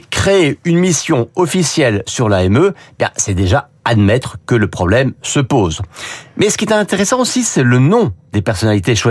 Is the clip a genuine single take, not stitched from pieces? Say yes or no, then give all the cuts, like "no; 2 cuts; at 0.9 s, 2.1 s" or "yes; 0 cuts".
yes; 0 cuts